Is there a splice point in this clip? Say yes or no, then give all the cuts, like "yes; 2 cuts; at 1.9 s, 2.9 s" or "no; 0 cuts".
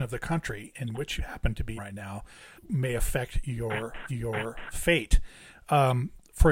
yes; 4 cuts; at 1.2 s, 1.8 s, 2.6 s, 4.1 s